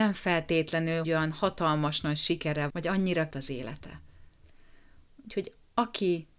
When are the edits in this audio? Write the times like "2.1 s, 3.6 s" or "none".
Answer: 1.0 s, 2.7 s, 3.3 s

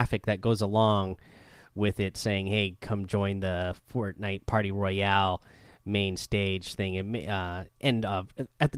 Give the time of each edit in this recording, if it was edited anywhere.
none

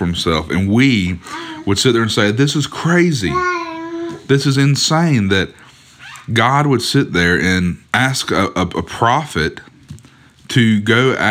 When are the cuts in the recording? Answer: 7.9 s

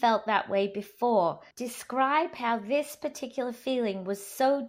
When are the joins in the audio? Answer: 1.5 s

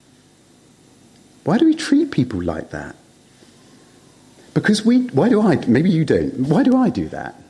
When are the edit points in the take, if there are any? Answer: none

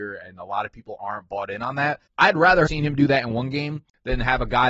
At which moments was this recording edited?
2.7 s

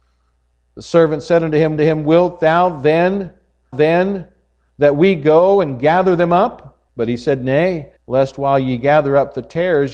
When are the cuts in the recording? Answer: 1.8 s, 3.7 s, 6.9 s, 8.0 s

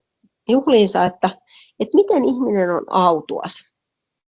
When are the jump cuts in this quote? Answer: none

